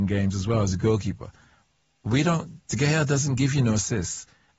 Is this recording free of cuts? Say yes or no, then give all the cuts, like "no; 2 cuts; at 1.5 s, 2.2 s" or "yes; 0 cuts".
yes; 0 cuts